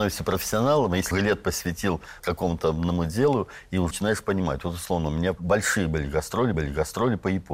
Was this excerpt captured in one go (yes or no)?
no